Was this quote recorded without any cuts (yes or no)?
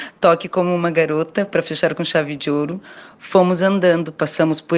yes